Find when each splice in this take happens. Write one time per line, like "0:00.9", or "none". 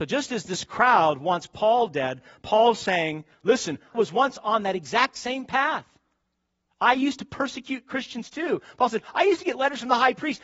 0:03.9